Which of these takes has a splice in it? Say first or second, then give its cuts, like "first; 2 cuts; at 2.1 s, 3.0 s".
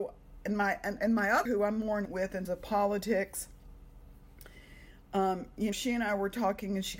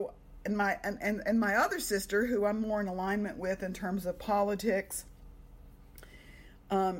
first; 5 cuts; at 1.0 s, 1.5 s, 2.1 s, 2.5 s, 5.7 s